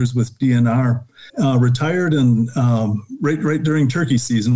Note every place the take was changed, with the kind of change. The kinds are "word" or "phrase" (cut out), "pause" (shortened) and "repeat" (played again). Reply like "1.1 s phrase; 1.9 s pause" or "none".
1.3 s pause